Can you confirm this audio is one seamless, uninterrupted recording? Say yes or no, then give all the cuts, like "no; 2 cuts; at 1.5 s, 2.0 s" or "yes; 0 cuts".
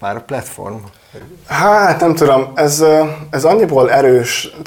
yes; 0 cuts